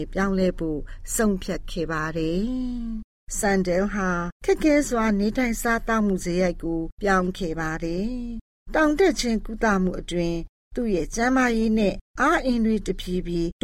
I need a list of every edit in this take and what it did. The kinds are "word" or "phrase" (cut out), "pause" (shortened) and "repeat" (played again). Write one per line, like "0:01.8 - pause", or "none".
0:06.9 - pause